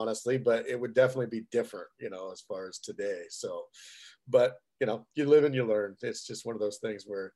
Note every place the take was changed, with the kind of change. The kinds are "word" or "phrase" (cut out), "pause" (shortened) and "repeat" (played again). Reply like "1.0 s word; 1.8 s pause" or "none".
none

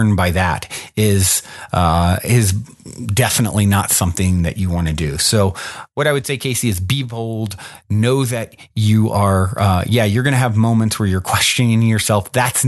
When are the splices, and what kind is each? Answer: none

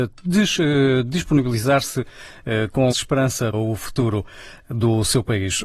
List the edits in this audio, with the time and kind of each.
2.9 s word; 3.5 s word

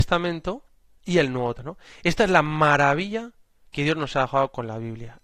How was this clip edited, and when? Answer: 1.6 s word

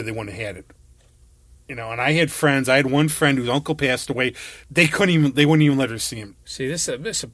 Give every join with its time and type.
4.6 s pause; 6.4 s pause

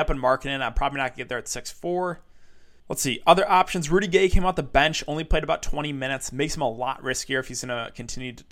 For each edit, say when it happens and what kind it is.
2.8 s pause

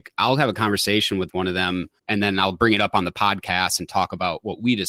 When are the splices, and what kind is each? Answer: 2.0 s pause

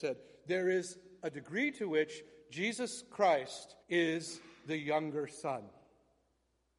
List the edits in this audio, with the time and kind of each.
3.8 s pause

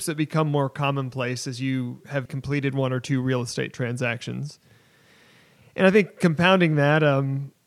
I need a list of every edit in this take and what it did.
2.3 s word

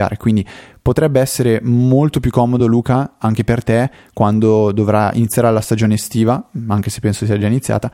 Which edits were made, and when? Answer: none

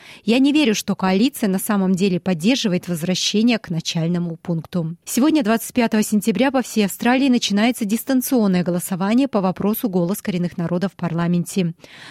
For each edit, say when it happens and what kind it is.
5.0 s pause

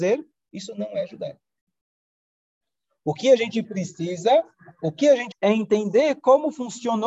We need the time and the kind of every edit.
5.3 s word

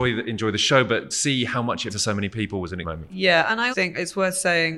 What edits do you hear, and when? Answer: 1.1 s word; 1.9 s word; 2.8 s word; 3.7 s word

